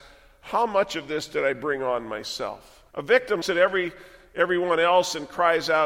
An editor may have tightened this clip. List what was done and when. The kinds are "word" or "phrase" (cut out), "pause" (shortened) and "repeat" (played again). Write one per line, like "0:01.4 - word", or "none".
0:02.9 - pause
0:03.4 - word